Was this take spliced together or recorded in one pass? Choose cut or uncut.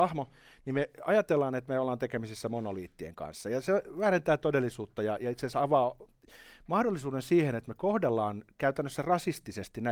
uncut